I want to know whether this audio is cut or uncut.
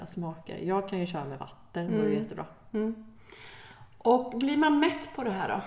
uncut